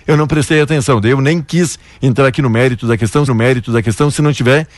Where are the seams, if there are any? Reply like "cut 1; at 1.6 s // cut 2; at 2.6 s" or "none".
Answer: cut 1; at 3.3 s